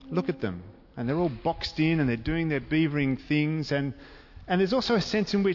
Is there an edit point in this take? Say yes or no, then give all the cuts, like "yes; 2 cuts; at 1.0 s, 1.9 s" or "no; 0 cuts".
no; 0 cuts